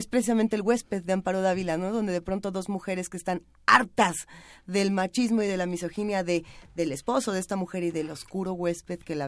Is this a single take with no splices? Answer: yes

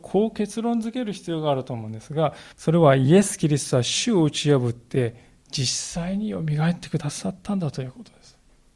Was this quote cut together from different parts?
yes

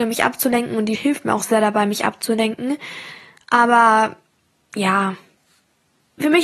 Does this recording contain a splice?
yes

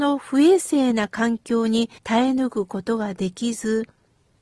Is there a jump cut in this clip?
yes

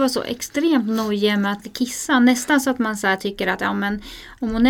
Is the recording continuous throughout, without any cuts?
no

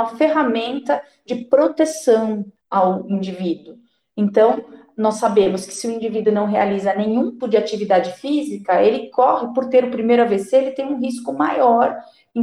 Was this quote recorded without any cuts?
no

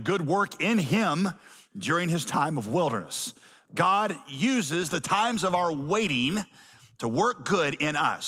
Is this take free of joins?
yes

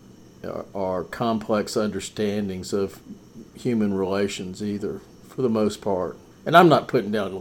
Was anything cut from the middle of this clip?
yes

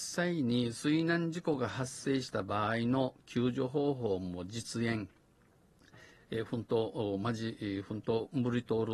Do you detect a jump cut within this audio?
no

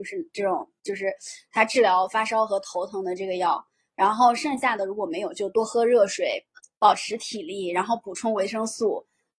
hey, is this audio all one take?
yes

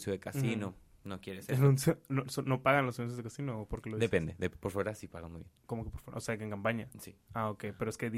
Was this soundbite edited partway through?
yes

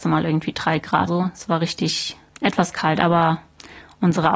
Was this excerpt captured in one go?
no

